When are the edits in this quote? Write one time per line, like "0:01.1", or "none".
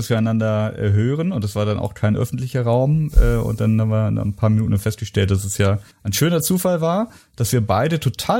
0:05.9